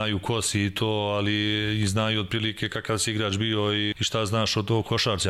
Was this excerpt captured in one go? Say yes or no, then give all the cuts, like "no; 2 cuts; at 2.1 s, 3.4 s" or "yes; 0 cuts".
no; 1 cut; at 3.9 s